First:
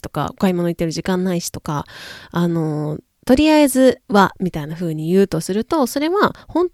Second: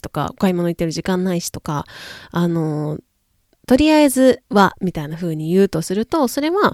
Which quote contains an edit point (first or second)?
first